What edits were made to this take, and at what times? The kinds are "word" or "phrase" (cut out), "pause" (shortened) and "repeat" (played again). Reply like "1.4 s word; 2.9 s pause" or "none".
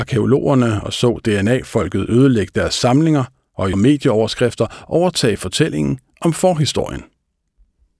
3.7 s word